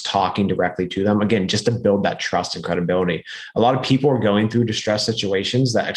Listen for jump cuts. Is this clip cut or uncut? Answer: uncut